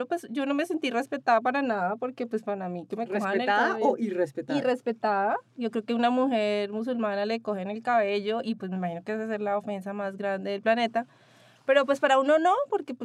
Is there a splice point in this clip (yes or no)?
no